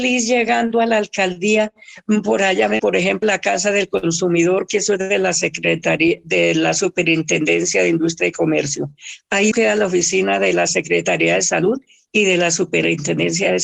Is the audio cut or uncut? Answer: cut